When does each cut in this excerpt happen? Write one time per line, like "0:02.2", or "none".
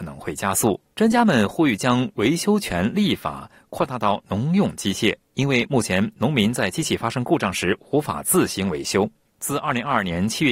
0:00.9
0:05.2
0:09.3